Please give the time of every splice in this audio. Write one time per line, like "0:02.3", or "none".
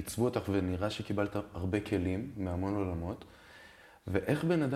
none